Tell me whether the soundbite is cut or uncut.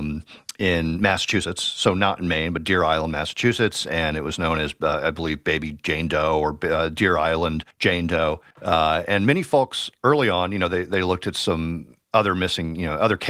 cut